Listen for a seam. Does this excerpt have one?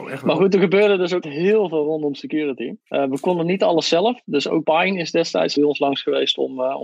yes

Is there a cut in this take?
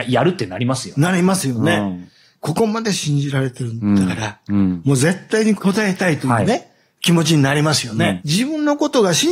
no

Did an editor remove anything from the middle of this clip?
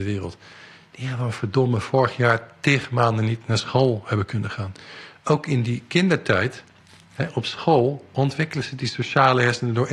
no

